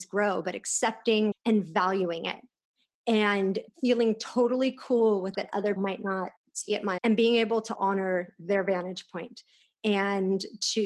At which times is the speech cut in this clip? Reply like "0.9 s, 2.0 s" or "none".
1.3 s, 3.7 s, 5.3 s, 5.8 s, 6.4 s, 7.0 s, 7.7 s